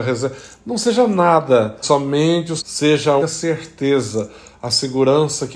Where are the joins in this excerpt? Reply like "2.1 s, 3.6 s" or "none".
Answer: 1.8 s, 2.6 s, 3.2 s